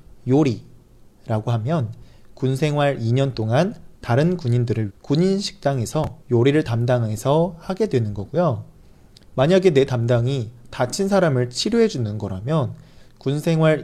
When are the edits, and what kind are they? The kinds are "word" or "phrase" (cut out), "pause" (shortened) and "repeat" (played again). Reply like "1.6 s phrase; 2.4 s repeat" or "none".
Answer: 4.0 s word; 4.9 s word; 6.2 s pause